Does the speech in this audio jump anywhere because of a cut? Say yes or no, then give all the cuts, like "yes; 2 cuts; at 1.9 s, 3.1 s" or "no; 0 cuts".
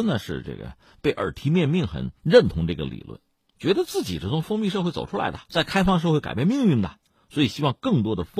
yes; 1 cut; at 5.4 s